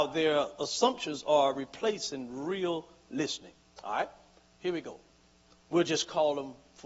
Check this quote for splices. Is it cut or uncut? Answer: uncut